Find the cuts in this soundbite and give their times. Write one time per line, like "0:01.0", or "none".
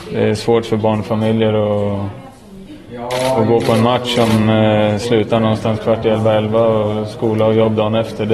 none